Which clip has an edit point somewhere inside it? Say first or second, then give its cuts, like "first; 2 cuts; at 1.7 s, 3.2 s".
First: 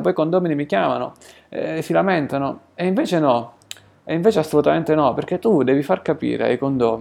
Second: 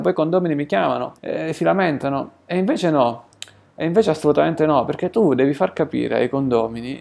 second; 1 cut; at 1.2 s